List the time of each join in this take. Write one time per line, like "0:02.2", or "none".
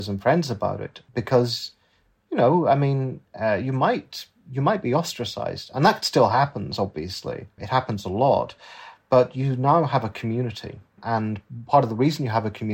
0:01.1